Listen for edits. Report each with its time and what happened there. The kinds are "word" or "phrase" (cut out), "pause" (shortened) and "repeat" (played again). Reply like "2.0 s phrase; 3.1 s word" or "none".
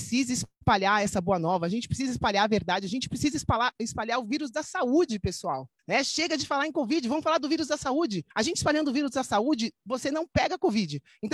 5.8 s pause; 8.3 s pause